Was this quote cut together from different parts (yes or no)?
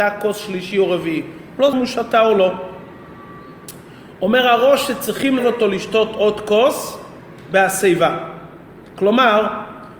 yes